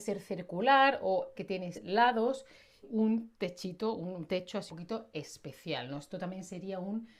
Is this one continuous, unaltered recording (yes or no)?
no